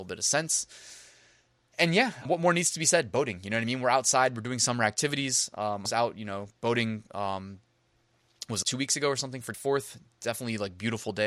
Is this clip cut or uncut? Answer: cut